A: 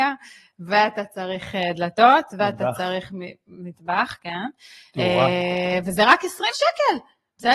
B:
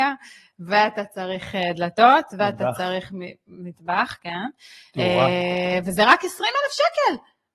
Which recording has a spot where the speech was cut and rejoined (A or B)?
A